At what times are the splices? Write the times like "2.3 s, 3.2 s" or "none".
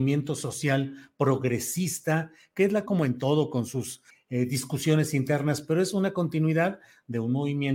2.9 s, 4.1 s

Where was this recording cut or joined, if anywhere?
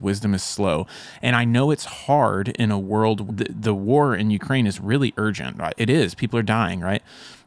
3.3 s

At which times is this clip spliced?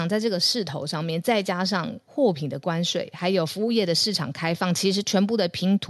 2.0 s

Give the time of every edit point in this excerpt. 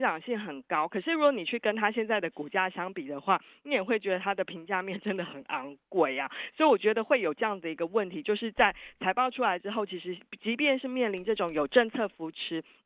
none

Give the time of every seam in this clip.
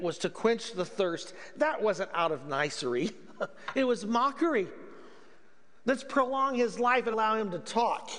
7.1 s

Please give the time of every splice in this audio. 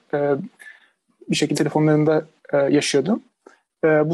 1.5 s

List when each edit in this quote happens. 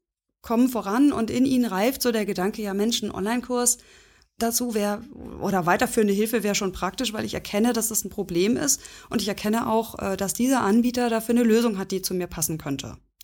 none

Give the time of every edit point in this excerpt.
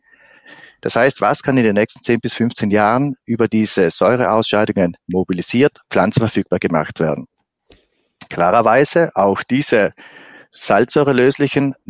none

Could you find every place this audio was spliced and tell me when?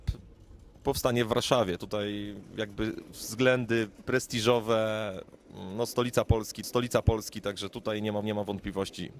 6.6 s, 8.2 s

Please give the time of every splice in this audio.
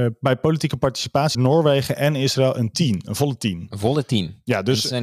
1.3 s

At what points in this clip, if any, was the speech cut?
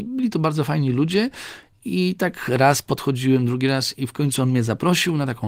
none

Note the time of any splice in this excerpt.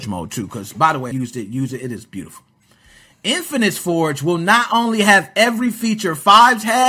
1.1 s

